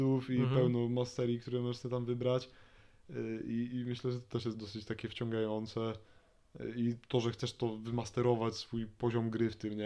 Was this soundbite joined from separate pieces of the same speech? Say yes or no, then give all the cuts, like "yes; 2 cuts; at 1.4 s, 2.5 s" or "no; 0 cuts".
no; 0 cuts